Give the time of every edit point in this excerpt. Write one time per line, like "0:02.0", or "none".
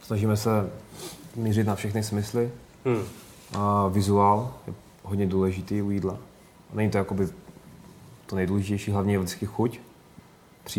none